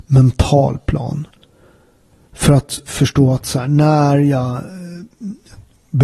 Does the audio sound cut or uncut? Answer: uncut